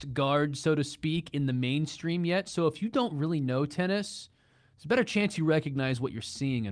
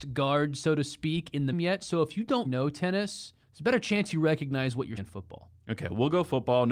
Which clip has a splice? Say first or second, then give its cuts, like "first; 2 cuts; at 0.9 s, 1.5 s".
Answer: second; 4 cuts; at 1.5 s, 2.4 s, 3.4 s, 5.0 s